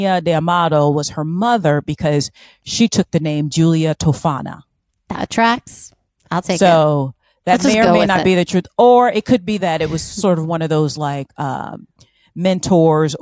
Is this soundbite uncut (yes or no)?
yes